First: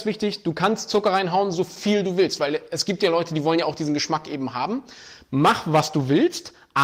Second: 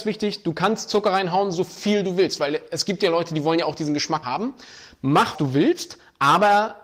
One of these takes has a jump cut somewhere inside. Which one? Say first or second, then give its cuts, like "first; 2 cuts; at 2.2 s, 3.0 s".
second; 2 cuts; at 4.2 s, 5.3 s